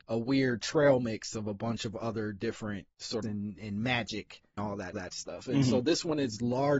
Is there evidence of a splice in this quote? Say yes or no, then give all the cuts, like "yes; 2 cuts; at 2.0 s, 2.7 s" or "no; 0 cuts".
yes; 3 cuts; at 3.2 s, 4.6 s, 4.9 s